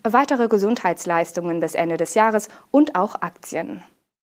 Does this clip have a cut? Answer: no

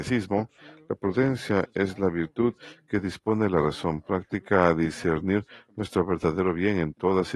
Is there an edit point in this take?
no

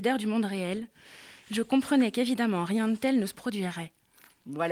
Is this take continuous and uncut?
yes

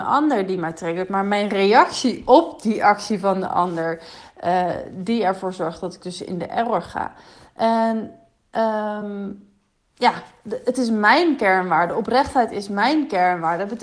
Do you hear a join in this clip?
no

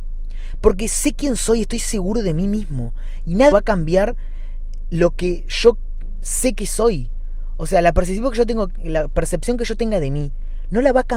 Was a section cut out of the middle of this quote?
yes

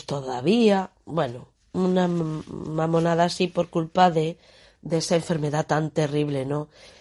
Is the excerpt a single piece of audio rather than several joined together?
yes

